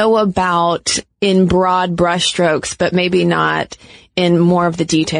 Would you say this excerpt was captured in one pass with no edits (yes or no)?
yes